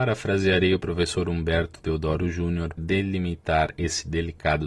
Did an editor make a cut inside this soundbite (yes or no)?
yes